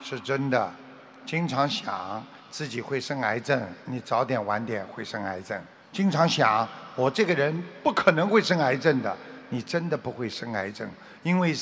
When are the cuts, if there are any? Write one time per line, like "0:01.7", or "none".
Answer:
0:03.8
0:05.7